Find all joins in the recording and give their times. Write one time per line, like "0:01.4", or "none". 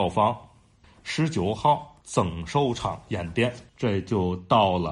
0:02.0
0:03.7